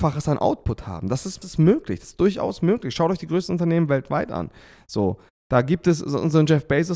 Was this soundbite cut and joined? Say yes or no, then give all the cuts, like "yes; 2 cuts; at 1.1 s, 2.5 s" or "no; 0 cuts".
yes; 1 cut; at 1.4 s